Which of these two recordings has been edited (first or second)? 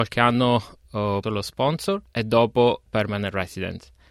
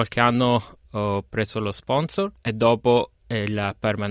first